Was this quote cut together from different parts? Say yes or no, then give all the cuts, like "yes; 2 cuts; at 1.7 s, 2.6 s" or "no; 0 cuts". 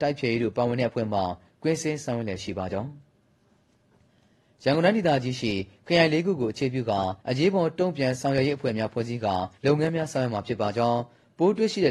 yes; 2 cuts; at 7.2 s, 9.5 s